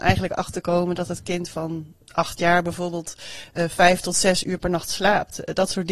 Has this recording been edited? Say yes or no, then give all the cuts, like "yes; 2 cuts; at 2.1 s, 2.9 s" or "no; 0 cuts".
no; 0 cuts